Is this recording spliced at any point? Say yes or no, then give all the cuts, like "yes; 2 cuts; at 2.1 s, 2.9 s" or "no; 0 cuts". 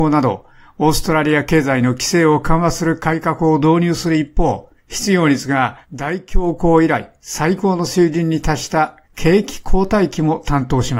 yes; 3 cuts; at 4.8 s, 5.8 s, 9.0 s